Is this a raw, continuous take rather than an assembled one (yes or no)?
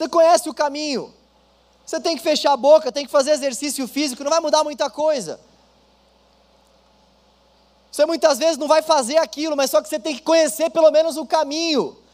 yes